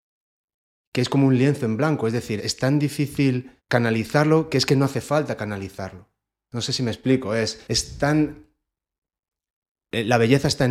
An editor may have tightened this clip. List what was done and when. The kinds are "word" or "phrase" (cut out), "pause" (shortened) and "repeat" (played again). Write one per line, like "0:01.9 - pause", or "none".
0:02.4 - word
0:03.6 - pause
0:07.6 - pause